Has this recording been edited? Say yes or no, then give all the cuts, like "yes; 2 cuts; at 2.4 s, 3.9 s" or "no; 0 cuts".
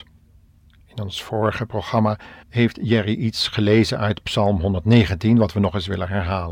yes; 1 cut; at 2.4 s